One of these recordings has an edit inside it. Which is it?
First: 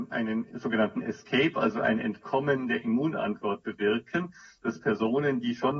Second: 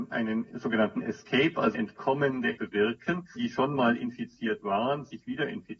second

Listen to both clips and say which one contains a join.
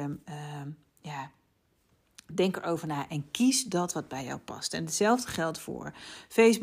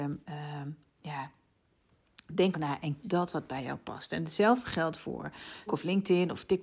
second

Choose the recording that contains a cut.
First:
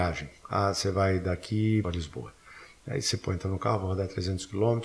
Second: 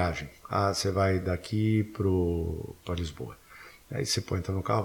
first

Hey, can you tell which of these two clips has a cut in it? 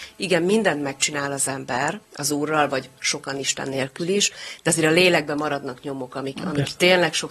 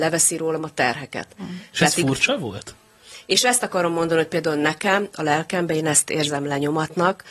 first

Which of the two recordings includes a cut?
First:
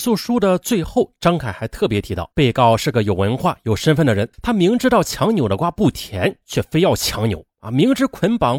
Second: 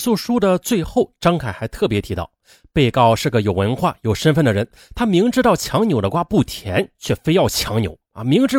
first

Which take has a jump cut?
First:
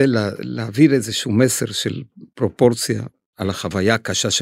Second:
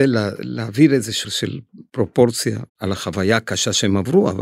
second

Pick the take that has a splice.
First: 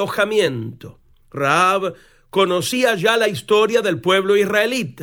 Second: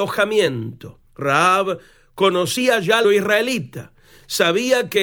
second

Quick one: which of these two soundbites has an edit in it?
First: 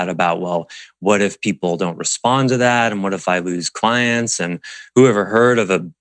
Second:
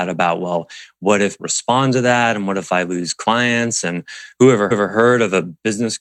second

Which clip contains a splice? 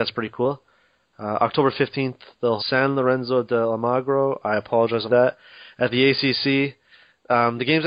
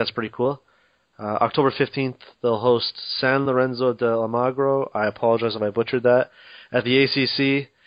first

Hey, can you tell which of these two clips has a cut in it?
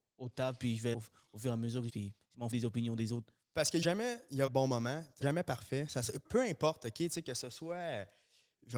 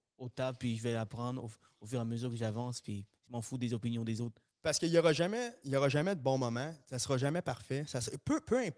first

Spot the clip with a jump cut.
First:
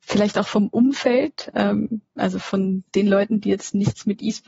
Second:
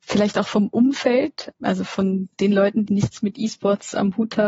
second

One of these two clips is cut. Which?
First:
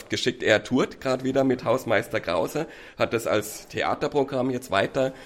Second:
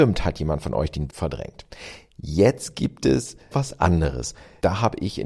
second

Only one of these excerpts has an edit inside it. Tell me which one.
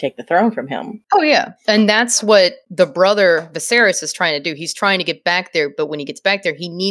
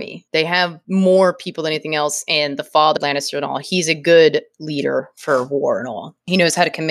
second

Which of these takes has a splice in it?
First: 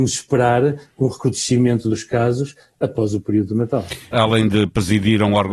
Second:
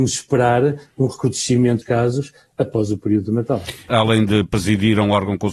second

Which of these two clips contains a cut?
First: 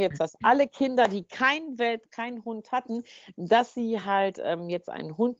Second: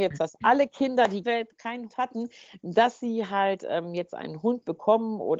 second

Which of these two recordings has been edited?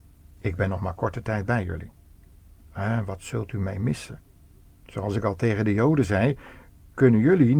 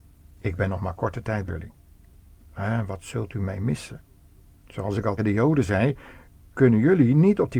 second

